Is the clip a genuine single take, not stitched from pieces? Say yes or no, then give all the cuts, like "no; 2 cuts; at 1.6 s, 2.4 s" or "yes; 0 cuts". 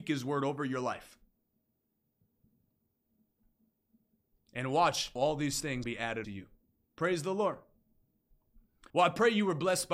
no; 4 cuts; at 5.2 s, 5.8 s, 6.2 s, 8.9 s